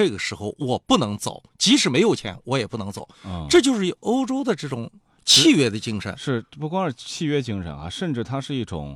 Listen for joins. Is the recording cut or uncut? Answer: uncut